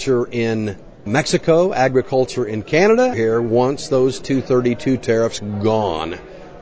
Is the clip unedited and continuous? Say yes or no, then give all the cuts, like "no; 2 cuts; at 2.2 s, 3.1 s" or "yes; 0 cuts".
no; 2 cuts; at 1.1 s, 3.1 s